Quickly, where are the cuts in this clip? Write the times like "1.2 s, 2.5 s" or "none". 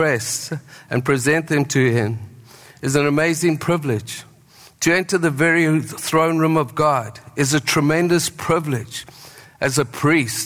none